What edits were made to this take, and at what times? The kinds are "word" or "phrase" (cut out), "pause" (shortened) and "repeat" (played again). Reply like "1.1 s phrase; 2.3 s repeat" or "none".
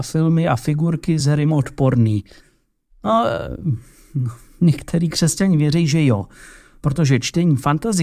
none